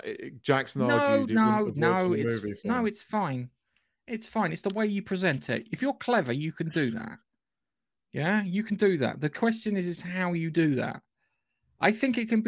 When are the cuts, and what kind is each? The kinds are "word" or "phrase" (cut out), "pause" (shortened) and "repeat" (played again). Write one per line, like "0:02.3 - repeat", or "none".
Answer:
none